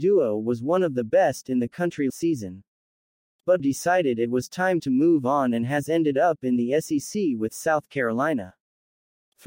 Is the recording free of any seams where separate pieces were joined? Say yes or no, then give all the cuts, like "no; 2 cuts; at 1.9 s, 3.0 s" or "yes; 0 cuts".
no; 2 cuts; at 2.1 s, 3.6 s